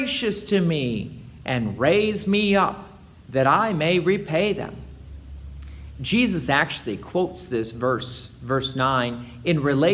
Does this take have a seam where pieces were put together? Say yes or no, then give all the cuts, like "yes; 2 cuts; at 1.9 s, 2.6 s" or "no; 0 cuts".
no; 0 cuts